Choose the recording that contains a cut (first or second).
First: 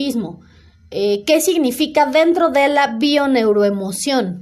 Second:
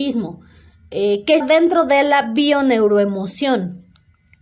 second